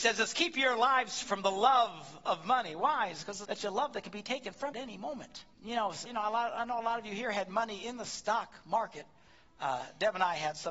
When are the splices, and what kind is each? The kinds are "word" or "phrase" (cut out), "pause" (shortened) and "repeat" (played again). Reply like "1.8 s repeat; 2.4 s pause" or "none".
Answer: 1.2 s word; 3.4 s phrase; 4.7 s word; 5.5 s pause; 6.0 s word